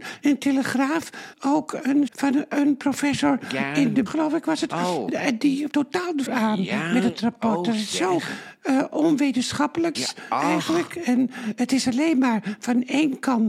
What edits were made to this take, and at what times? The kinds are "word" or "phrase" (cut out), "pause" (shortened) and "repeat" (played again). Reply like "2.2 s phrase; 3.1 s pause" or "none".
1.3 s word; 2.1 s word; 4.1 s word; 5.7 s word; 6.3 s word; 9.9 s word

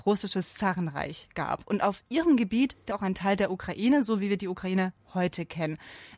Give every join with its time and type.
2.9 s word

